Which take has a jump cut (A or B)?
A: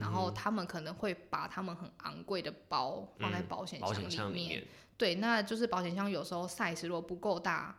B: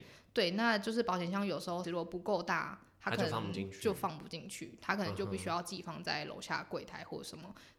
B